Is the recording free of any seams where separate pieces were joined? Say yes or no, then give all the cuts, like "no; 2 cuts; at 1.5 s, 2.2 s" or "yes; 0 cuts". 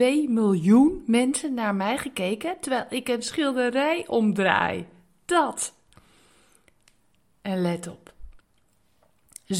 yes; 0 cuts